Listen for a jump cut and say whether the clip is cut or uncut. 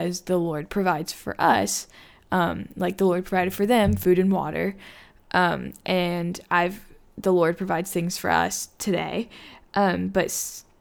uncut